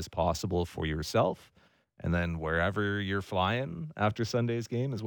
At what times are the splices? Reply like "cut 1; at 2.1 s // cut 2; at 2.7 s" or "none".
none